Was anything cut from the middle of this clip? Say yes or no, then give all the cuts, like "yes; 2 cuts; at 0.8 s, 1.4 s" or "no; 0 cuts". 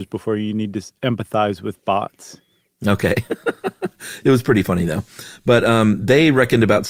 no; 0 cuts